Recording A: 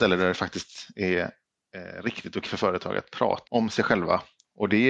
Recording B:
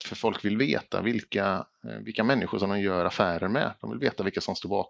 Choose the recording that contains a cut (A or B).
A